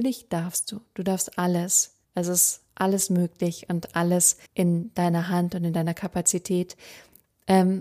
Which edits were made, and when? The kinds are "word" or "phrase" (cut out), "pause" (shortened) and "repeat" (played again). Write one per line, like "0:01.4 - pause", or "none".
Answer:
0:02.0 - pause
0:02.7 - pause
0:04.5 - pause